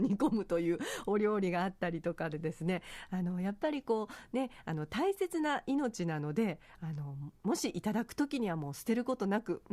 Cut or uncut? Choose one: uncut